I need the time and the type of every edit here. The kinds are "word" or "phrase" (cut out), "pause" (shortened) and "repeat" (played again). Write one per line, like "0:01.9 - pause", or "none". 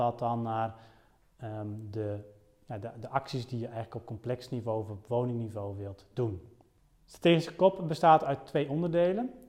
none